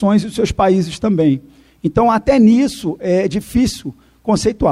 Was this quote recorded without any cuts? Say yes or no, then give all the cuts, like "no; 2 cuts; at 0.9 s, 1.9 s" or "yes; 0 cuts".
yes; 0 cuts